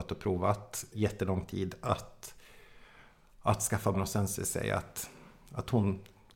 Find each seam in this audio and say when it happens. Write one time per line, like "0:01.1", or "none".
0:00.9
0:03.9
0:04.4